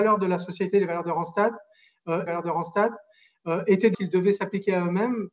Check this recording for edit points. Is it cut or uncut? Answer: cut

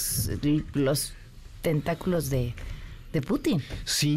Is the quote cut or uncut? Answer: uncut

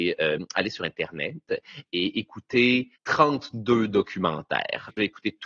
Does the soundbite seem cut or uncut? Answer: cut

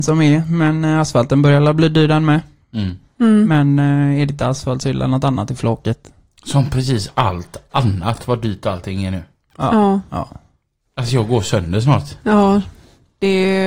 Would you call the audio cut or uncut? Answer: uncut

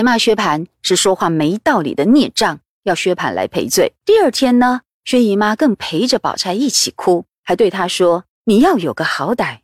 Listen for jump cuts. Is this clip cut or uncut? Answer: cut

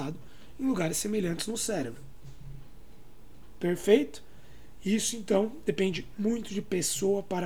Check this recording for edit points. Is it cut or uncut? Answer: uncut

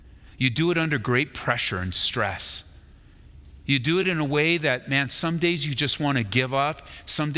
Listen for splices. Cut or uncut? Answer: uncut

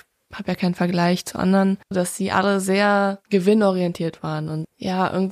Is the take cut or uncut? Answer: cut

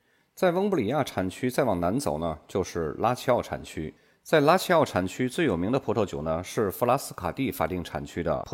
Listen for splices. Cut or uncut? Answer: uncut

